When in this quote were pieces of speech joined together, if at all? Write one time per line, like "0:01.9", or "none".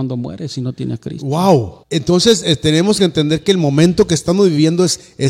0:01.8